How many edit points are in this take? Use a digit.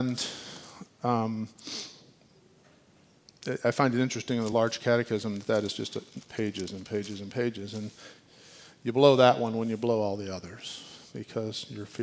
0